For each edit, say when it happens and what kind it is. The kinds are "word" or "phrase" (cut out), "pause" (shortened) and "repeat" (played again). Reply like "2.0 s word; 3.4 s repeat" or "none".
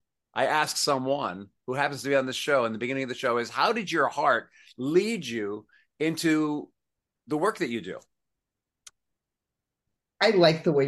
none